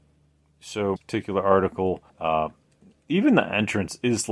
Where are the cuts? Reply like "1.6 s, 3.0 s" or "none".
1.0 s, 2.1 s